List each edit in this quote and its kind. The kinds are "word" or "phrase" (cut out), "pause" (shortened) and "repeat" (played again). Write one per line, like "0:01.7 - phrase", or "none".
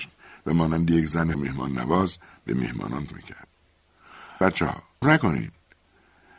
0:01.3 - word
0:03.1 - word
0:04.4 - word
0:05.0 - word